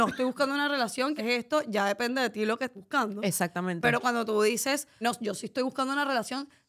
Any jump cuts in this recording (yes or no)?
yes